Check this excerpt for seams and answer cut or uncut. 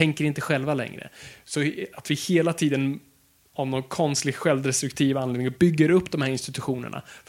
uncut